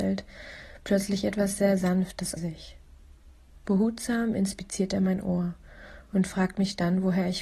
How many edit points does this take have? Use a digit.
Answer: 1